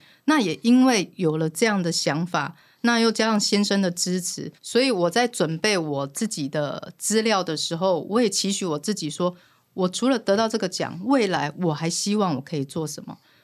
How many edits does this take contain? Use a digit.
1